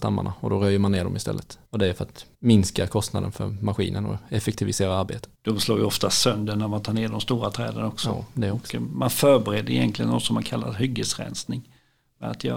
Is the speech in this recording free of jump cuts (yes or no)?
no